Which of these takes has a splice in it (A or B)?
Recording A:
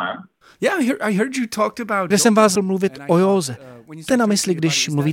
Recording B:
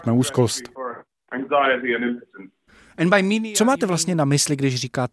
A